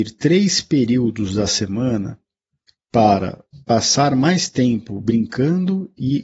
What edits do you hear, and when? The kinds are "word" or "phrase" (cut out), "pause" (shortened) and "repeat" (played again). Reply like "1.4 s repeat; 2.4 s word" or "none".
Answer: 3.6 s pause